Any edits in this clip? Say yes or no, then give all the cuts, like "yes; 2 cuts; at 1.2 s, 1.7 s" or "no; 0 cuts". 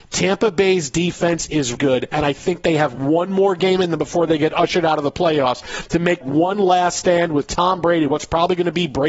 yes; 2 cuts; at 1.7 s, 6.2 s